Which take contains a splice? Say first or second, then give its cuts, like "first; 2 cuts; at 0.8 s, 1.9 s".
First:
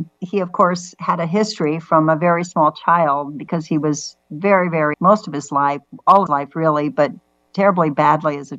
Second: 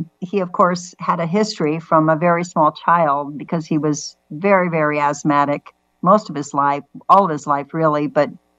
first; 2 cuts; at 4.9 s, 6.3 s